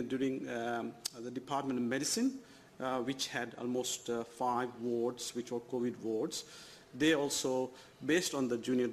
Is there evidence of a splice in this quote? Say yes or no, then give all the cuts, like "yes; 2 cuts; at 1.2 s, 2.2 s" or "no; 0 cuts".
no; 0 cuts